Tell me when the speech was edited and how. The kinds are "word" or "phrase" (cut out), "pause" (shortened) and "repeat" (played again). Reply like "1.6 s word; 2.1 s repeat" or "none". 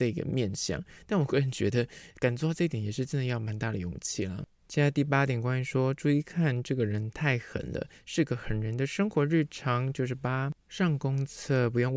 10.6 s pause